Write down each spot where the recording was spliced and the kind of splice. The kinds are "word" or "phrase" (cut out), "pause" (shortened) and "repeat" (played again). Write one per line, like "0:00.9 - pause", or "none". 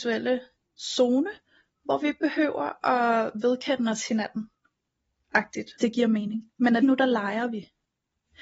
0:05.8 - word
0:06.8 - word